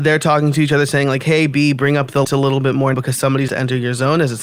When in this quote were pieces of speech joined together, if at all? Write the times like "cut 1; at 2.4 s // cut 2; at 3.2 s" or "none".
cut 1; at 2.2 s // cut 2; at 2.9 s // cut 3; at 3.5 s